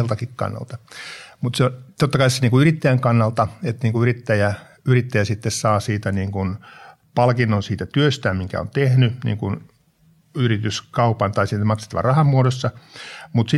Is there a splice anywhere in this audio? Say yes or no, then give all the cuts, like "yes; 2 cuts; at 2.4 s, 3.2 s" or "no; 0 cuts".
no; 0 cuts